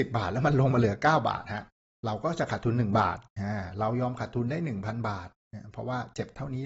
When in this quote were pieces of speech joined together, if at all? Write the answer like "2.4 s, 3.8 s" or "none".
3.3 s